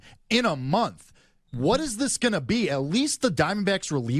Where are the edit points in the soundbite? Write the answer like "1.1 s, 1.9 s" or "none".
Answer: none